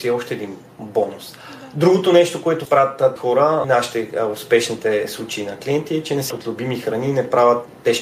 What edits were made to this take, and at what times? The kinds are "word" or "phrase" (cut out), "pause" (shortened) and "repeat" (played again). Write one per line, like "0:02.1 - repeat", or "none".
0:02.6 - word
0:03.2 - word
0:03.6 - word
0:06.3 - word